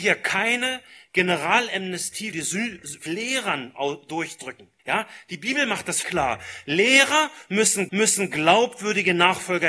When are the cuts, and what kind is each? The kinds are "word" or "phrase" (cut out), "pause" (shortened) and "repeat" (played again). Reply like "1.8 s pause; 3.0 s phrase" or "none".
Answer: 2.3 s word; 3.1 s phrase; 4.8 s pause; 6.0 s word; 7.9 s repeat